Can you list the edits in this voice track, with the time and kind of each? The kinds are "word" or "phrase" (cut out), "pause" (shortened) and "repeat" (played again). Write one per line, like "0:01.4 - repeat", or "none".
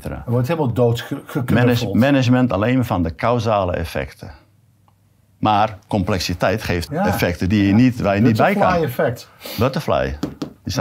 0:05.8 - pause
0:06.9 - phrase